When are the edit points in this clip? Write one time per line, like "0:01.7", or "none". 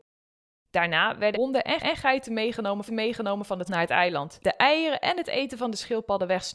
0:01.3
0:01.8
0:02.9
0:03.7
0:04.4